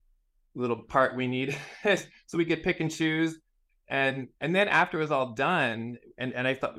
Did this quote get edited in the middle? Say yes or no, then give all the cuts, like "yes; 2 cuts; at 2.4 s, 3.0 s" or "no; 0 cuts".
yes; 1 cut; at 4.3 s